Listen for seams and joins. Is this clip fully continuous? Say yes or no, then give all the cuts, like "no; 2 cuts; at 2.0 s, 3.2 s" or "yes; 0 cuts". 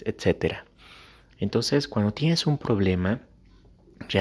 yes; 0 cuts